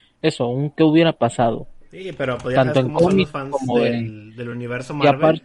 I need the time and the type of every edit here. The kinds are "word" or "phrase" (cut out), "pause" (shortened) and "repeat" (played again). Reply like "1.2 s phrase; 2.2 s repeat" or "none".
none